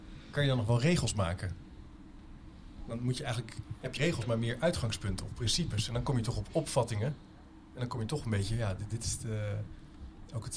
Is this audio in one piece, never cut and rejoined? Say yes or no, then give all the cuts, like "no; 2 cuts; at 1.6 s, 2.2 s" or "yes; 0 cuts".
no; 1 cut; at 4.0 s